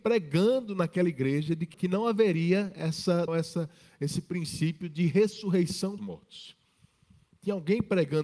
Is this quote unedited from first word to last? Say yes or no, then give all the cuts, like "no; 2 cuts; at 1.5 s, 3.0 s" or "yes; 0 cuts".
no; 3 cuts; at 1.7 s, 3.3 s, 6.0 s